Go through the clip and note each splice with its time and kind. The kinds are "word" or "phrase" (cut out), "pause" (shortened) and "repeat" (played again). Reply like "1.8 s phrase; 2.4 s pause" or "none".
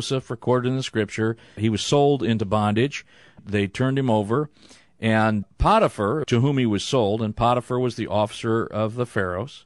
none